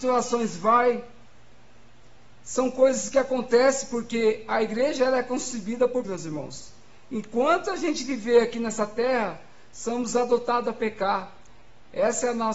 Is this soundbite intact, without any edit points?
no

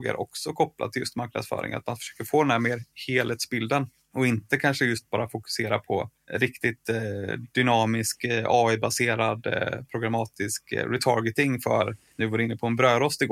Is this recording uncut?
yes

